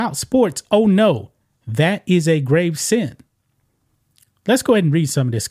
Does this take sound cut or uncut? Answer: uncut